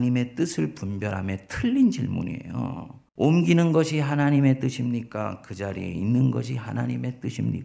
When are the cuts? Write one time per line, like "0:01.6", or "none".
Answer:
0:03.1